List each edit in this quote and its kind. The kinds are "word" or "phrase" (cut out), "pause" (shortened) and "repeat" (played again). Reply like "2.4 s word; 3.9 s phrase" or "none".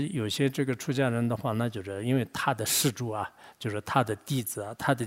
none

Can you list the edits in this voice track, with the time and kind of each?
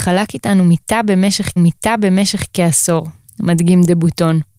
1.6 s repeat

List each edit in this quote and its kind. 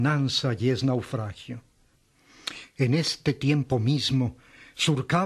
none

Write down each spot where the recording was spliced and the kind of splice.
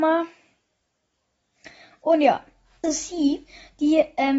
2.8 s word

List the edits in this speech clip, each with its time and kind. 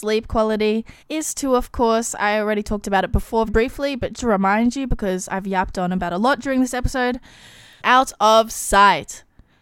1.0 s pause; 3.5 s word; 4.2 s word; 7.8 s phrase

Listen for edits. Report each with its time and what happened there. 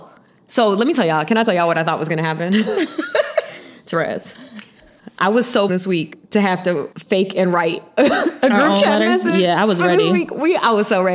5.7 s word; 6.9 s pause

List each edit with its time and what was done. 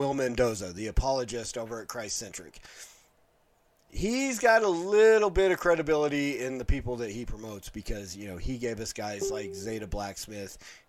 none

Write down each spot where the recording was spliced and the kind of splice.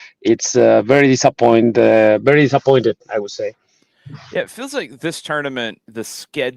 none

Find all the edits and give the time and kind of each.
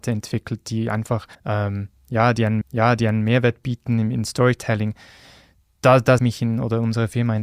1.3 s pause; 2.6 s repeat; 4.3 s word; 6.2 s phrase

